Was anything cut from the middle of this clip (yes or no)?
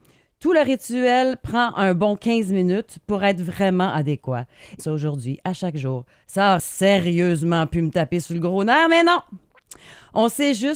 yes